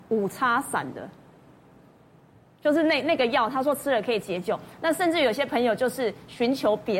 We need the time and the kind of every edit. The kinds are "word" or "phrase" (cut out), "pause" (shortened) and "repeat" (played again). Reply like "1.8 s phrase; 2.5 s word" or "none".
none